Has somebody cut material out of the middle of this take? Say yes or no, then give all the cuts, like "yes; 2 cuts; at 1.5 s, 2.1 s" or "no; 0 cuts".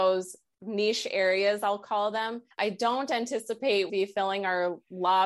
yes; 2 cuts; at 2.5 s, 3.9 s